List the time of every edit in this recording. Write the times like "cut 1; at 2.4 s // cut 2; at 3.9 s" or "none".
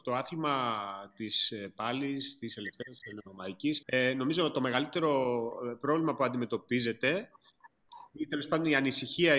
cut 1; at 3.8 s